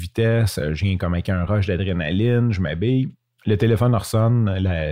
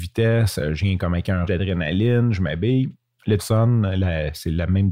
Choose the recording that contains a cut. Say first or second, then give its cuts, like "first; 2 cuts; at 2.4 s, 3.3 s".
second; 2 cuts; at 1.5 s, 3.4 s